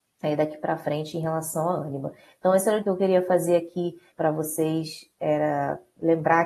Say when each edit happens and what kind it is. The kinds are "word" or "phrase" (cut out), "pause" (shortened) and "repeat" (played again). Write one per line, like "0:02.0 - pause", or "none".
0:02.8 - word
0:04.1 - word